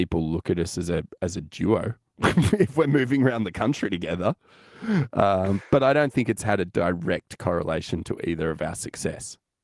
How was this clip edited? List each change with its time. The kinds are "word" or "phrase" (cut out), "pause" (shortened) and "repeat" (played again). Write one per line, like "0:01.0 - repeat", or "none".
none